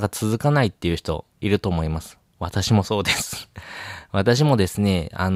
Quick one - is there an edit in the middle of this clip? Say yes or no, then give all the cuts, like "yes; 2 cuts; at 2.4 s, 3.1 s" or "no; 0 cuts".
yes; 1 cut; at 1.3 s